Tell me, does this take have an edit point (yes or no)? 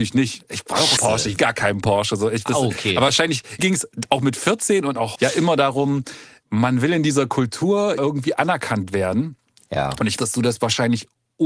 yes